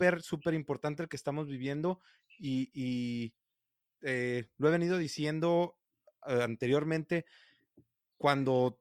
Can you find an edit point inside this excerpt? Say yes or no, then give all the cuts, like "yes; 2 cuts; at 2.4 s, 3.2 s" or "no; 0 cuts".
no; 0 cuts